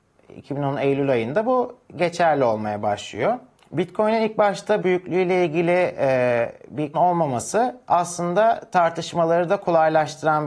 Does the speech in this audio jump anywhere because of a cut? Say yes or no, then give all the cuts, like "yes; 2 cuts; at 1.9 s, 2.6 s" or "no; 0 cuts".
yes; 2 cuts; at 4.8 s, 6.9 s